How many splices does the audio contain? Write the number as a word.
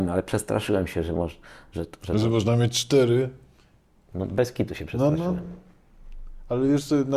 zero